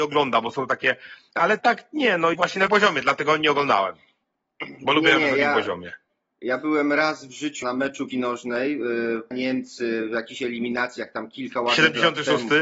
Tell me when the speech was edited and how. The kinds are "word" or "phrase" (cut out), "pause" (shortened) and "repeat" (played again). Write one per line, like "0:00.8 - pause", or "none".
0:01.6 - word
0:02.3 - word
0:02.7 - word
0:07.6 - word
0:08.1 - word
0:09.3 - word